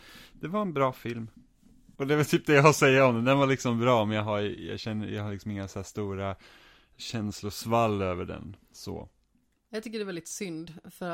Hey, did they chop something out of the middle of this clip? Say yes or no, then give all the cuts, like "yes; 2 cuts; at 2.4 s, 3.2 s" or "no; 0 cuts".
yes; 2 cuts; at 2.0 s, 8.6 s